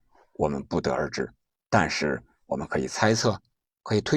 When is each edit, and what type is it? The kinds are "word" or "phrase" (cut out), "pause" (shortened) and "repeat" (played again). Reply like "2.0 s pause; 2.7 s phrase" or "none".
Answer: none